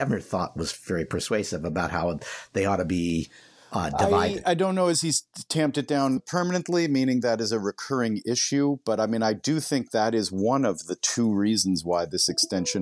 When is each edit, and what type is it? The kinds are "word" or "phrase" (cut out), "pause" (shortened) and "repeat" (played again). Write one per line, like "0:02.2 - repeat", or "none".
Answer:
none